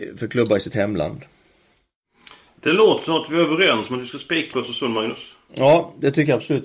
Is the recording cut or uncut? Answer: cut